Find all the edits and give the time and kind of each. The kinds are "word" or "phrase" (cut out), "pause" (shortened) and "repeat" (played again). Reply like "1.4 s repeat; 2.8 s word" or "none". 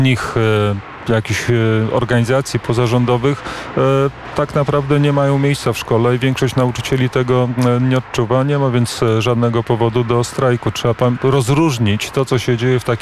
none